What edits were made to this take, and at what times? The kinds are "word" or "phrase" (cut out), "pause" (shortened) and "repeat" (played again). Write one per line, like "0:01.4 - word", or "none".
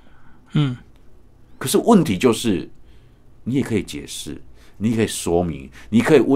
none